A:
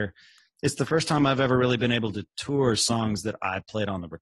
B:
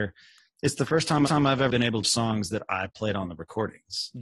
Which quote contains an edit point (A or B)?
B